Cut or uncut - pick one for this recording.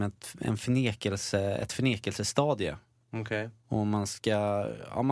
uncut